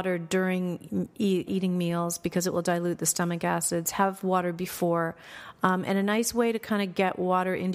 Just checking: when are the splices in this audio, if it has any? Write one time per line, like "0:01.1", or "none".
0:01.5